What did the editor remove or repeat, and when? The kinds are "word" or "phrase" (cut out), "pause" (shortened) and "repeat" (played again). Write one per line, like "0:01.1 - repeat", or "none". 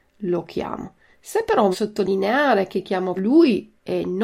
0:01.7 - word
0:03.2 - word